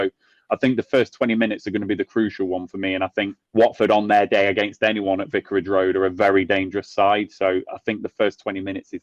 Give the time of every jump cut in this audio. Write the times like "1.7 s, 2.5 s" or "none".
3.5 s